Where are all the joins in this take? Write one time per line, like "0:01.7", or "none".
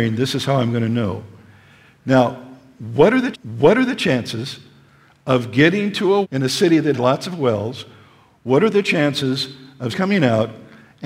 0:03.3
0:06.2
0:06.9
0:09.9